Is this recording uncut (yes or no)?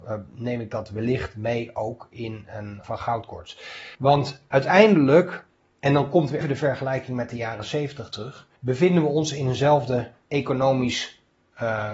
no